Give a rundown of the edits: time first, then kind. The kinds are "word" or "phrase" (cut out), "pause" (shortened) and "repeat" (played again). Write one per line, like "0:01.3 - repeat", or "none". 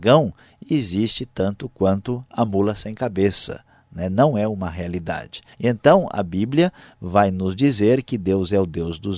0:05.5 - pause